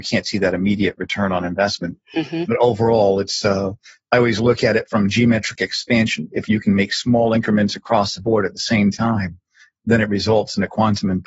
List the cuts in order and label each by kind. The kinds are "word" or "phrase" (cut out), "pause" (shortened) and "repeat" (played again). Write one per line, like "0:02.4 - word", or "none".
none

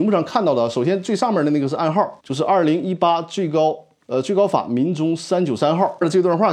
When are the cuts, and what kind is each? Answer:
0:02.2 - pause
0:04.0 - pause

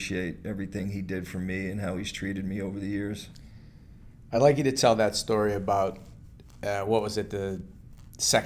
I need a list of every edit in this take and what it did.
none

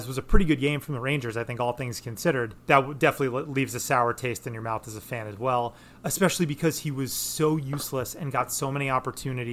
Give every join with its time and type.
0:02.6 - pause

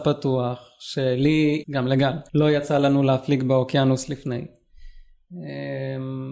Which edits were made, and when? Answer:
0:01.6 - word
0:02.3 - pause

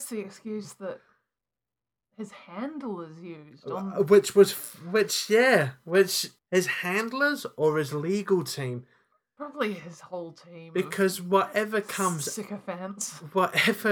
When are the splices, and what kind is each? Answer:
0:06.4 - pause

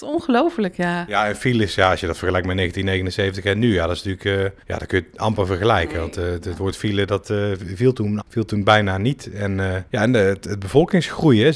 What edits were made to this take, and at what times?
0:04.6 - pause
0:08.2 - word
0:09.9 - pause

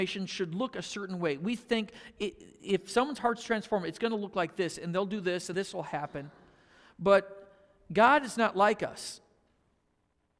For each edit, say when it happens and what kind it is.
0:05.5 - word

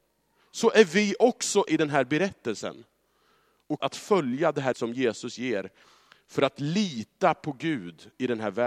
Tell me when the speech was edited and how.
0:01.7 - word
0:03.8 - word
0:04.7 - word

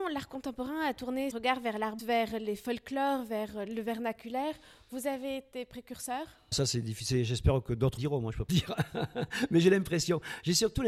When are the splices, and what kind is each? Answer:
0:01.3 - word
0:02.0 - word
0:06.5 - word
0:08.0 - word
0:08.5 - word

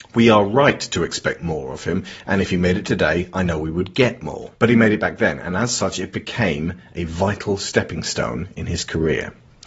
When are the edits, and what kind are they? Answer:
0:04.6 - pause

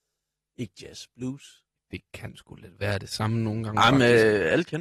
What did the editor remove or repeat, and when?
0:01.8 - pause

